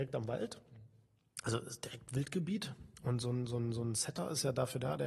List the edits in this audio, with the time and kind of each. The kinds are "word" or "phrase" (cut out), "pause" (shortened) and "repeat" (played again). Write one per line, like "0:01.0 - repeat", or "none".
none